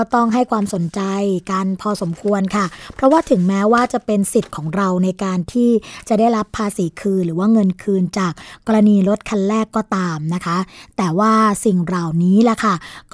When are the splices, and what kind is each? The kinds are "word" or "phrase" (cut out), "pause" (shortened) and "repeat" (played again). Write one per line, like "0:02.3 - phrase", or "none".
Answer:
none

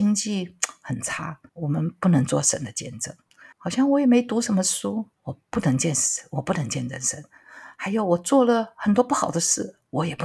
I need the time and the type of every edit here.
0:01.5 - pause
0:03.5 - pause
0:05.1 - pause

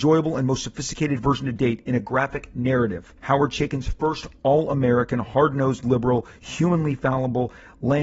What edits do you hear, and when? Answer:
0:03.2 - pause

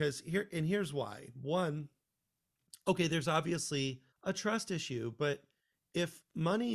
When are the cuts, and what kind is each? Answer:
0:04.1 - pause

